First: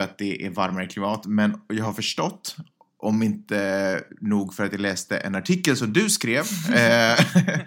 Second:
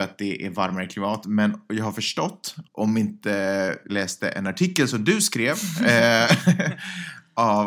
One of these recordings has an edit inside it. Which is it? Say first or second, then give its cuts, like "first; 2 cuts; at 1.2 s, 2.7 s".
second; 2 cuts; at 2.7 s, 3.9 s